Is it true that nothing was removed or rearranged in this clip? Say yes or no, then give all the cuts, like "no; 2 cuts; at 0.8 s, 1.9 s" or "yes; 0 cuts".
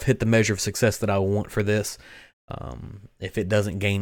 yes; 0 cuts